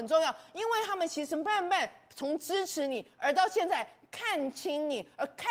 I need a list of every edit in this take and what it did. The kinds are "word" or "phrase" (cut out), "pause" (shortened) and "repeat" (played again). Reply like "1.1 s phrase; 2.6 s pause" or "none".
none

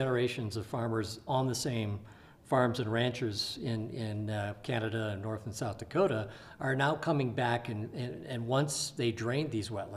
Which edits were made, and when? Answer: none

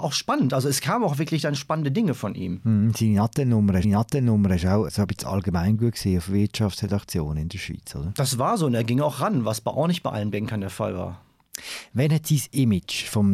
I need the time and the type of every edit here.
3.8 s repeat

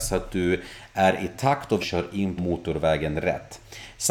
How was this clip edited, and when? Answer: 1.8 s word; 2.4 s word

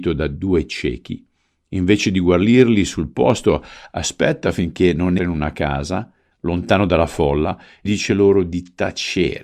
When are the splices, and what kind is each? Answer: 5.2 s word; 7.9 s word

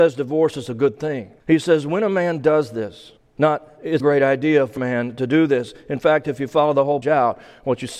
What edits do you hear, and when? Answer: 1.4 s pause; 3.2 s pause; 4.0 s word; 4.8 s word; 7.0 s word

